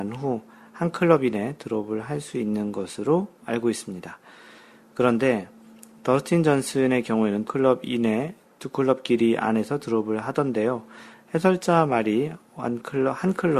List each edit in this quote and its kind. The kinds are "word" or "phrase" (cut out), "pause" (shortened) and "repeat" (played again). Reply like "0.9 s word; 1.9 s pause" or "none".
7.4 s word